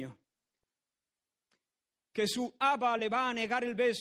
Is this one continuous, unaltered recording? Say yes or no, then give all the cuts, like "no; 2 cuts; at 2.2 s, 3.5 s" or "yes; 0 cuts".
yes; 0 cuts